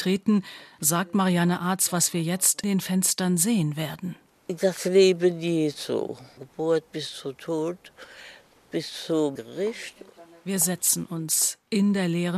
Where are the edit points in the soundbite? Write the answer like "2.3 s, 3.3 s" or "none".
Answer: 2.6 s, 6.4 s, 9.4 s